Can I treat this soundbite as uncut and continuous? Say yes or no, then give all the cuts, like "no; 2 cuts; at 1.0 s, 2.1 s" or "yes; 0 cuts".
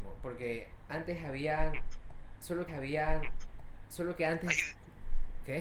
no; 1 cut; at 2.7 s